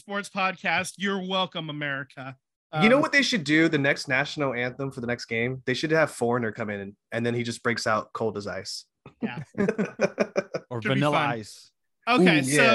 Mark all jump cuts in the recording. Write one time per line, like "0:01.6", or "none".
none